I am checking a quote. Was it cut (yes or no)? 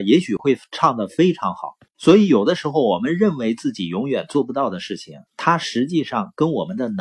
yes